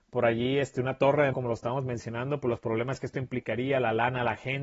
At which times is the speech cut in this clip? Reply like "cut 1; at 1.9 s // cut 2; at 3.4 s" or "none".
cut 1; at 1.3 s

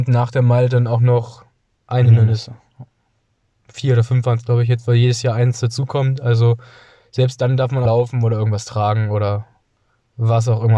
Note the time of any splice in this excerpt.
cut 1; at 7.9 s

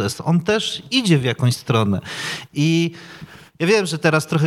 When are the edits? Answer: none

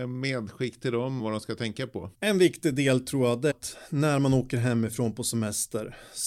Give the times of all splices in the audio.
cut 1; at 1.2 s // cut 2; at 2.1 s // cut 3; at 3.5 s

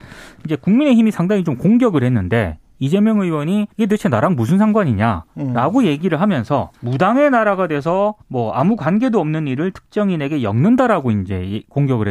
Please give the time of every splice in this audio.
cut 1; at 3.7 s // cut 2; at 6.7 s // cut 3; at 8.2 s

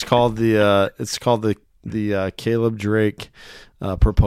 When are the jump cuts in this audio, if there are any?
none

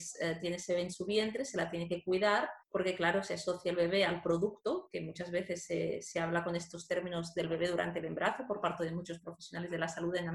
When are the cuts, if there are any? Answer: cut 1; at 2.6 s

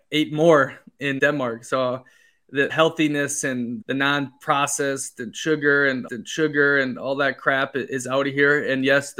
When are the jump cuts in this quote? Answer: cut 1; at 1.2 s // cut 2; at 2.7 s // cut 3; at 3.8 s // cut 4; at 6.1 s

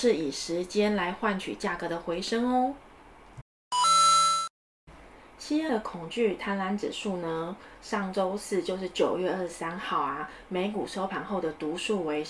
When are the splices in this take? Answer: cut 1; at 5.7 s

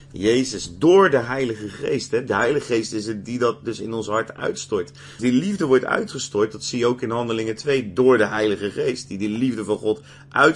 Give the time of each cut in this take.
cut 1; at 5.2 s

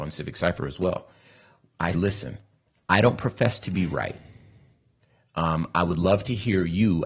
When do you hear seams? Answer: cut 1; at 1.9 s

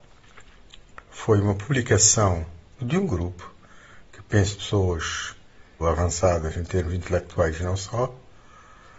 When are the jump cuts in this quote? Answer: cut 1; at 1.1 s // cut 2; at 2.8 s // cut 3; at 5.8 s

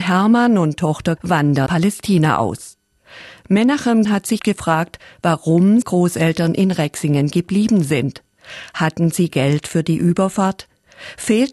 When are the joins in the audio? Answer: cut 1; at 1.2 s // cut 2; at 1.7 s // cut 3; at 4.0 s // cut 4; at 4.4 s // cut 5; at 5.8 s // cut 6; at 9.3 s

